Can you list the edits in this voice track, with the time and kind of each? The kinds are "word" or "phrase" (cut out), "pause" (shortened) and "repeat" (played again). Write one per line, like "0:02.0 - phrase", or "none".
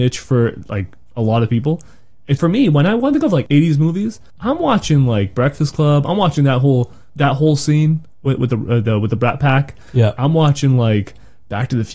0:02.4 - word

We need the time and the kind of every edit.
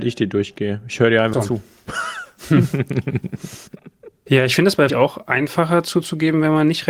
0:01.3 - word
0:03.7 - pause
0:04.9 - phrase

